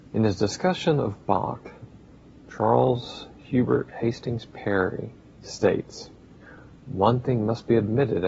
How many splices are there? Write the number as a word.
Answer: zero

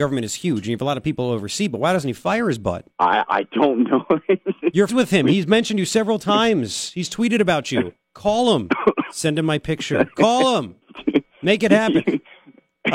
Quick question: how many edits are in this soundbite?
three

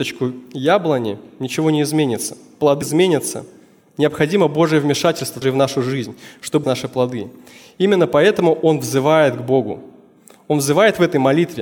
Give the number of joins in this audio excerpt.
three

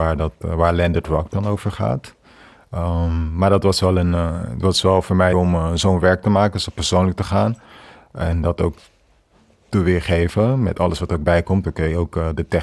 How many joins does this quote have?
one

